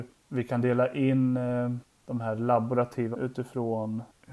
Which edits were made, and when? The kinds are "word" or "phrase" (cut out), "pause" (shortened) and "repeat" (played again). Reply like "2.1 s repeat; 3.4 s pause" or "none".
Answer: 3.1 s word